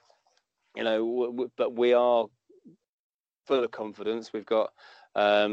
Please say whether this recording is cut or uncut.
uncut